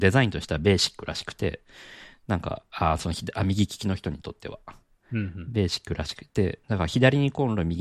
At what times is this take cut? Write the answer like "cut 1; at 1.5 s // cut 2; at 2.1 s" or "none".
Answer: cut 1; at 6.6 s

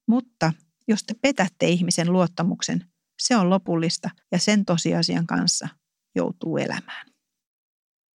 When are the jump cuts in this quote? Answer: cut 1; at 4.2 s

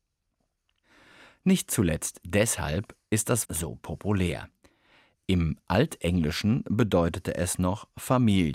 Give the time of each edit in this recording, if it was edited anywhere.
cut 1; at 3.4 s

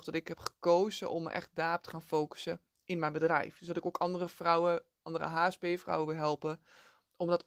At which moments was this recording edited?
none

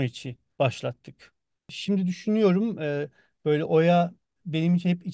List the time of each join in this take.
none

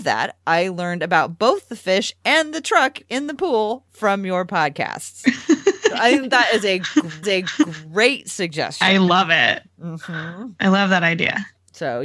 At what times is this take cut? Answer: cut 1; at 7.2 s

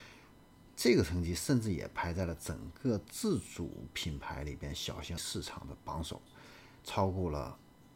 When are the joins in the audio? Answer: cut 1; at 5.2 s

